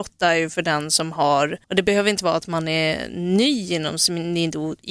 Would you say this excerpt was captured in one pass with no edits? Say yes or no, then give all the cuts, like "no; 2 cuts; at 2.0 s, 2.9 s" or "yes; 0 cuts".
no; 1 cut; at 1.6 s